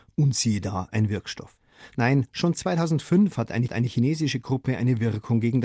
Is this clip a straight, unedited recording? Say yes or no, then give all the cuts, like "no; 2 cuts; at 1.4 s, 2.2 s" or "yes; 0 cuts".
no; 1 cut; at 3.7 s